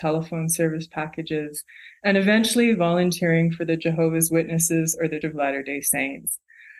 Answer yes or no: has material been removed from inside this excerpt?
yes